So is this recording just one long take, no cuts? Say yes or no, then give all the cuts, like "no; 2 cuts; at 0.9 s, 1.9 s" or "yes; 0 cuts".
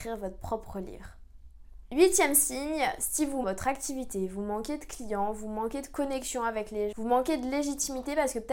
no; 2 cuts; at 3.4 s, 6.9 s